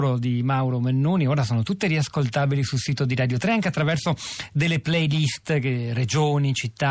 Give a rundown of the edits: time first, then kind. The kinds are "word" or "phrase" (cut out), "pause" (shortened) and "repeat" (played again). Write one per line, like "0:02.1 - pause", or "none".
none